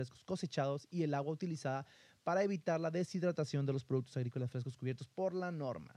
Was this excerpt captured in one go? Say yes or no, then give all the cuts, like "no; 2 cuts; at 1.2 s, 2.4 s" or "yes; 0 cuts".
yes; 0 cuts